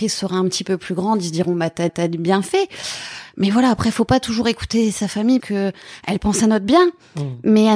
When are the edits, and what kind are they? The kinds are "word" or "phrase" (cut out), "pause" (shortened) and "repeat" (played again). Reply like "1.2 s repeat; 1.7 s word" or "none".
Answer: 1.9 s repeat; 5.4 s word